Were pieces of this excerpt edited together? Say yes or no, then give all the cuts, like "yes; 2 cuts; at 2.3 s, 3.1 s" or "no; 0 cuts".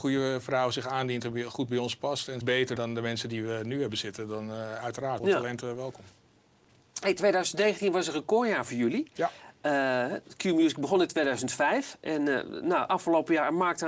yes; 4 cuts; at 2.4 s, 2.8 s, 5.2 s, 5.6 s